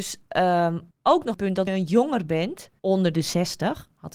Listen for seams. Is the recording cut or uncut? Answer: cut